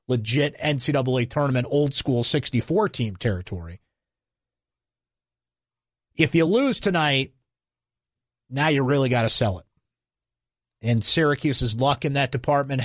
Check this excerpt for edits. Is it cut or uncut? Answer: uncut